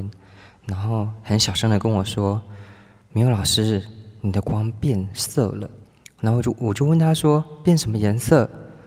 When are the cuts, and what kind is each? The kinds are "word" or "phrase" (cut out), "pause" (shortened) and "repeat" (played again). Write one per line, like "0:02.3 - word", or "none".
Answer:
0:05.8 - pause